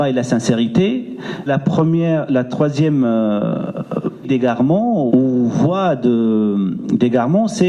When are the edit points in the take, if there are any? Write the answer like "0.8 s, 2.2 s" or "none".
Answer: 1.5 s, 4.2 s, 5.1 s